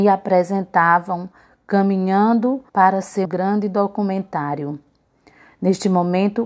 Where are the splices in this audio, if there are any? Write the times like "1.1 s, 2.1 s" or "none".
2.7 s, 3.2 s